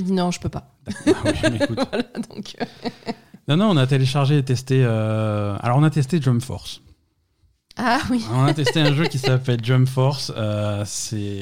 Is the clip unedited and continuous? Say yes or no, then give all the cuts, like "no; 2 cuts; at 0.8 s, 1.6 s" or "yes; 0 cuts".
yes; 0 cuts